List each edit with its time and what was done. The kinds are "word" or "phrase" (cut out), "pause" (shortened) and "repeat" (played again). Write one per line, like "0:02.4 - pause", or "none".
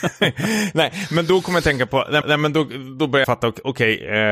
0:02.2 - repeat
0:03.2 - phrase